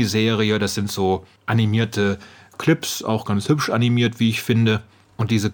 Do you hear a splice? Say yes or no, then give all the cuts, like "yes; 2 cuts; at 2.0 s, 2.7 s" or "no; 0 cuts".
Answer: no; 0 cuts